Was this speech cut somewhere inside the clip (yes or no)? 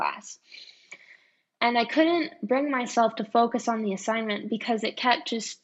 no